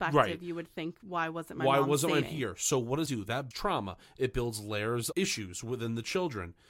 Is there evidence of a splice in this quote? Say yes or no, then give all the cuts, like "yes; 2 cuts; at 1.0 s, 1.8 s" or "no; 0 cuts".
yes; 4 cuts; at 2.2 s, 3.1 s, 3.5 s, 5.1 s